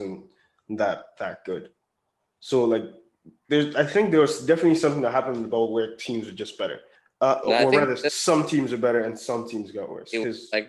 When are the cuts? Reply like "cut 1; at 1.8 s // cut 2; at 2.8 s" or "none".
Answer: cut 1; at 7.0 s

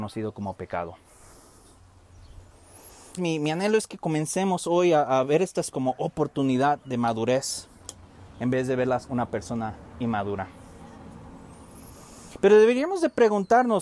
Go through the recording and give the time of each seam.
cut 1; at 3.2 s // cut 2; at 5.7 s // cut 3; at 9.1 s

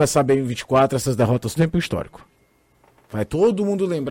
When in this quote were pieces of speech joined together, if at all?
cut 1; at 1.6 s

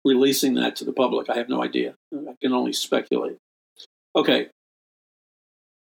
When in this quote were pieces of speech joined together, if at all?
none

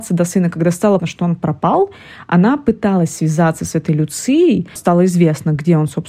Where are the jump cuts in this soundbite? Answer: cut 1; at 1.0 s // cut 2; at 4.8 s

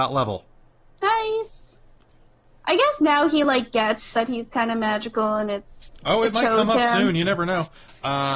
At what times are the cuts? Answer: none

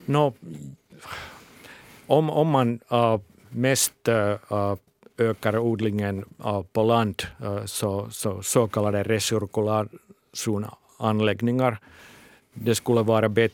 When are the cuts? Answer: none

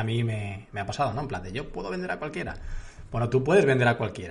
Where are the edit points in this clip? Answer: none

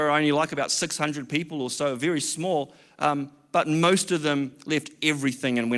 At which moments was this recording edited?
none

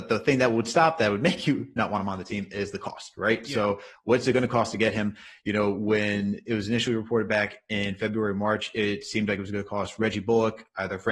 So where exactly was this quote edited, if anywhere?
none

